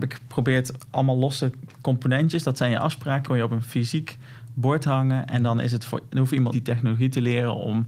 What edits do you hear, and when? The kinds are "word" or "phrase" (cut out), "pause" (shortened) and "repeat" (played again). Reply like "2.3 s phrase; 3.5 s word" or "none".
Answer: 3.2 s word; 6.5 s word